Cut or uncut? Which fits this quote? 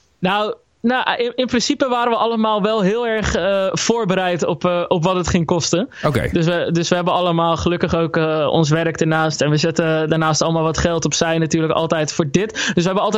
uncut